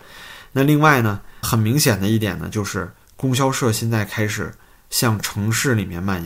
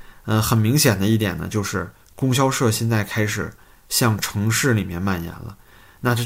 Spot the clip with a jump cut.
first; 1 cut; at 1.4 s

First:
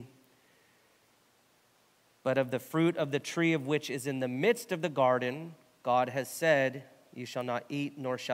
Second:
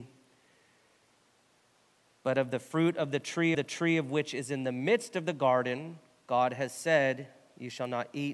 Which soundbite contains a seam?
second; 1 cut; at 3.5 s

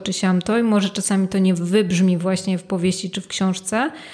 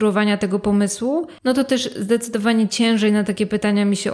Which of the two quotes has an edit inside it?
second; 1 cut; at 1.4 s

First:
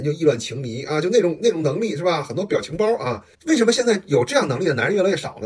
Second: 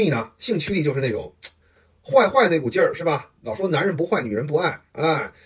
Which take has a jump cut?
first; 1 cut; at 3.3 s

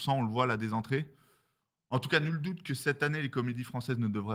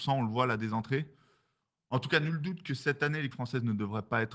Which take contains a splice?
second; 1 cut; at 3.3 s

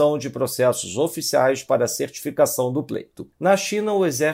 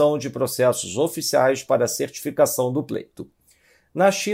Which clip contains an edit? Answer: first; 1 cut; at 3.3 s

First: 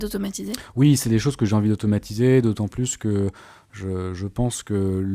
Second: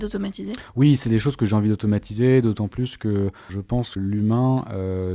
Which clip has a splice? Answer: second; 2 cuts; at 3.5 s, 4.0 s

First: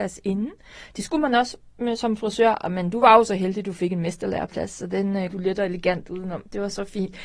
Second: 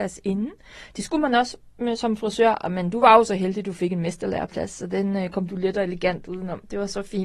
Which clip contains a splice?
first; 1 cut; at 5.3 s

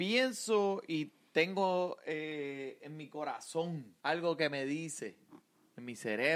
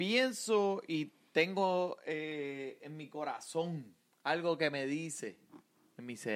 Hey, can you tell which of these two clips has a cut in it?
first; 1 cut; at 4.0 s

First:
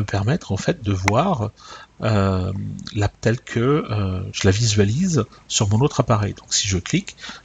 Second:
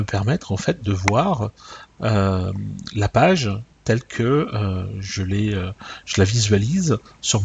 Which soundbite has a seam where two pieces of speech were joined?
first; 2 cuts; at 3.1 s, 4.3 s

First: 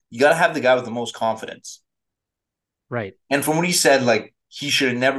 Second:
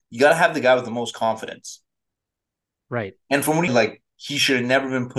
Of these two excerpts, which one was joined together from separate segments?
second; 1 cut; at 3.7 s

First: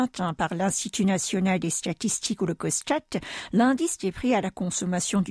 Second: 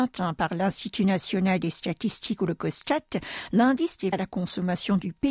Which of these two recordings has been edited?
second; 1 cut; at 4.1 s

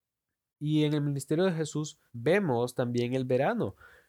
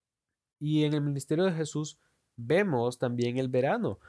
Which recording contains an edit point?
first; 1 cut; at 2.1 s

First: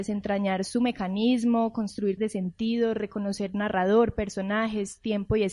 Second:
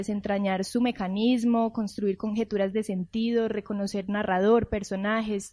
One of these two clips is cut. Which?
first; 1 cut; at 2.2 s

